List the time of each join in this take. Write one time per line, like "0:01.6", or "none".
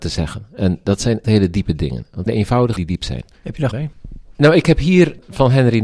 0:01.2
0:02.3
0:02.8
0:03.7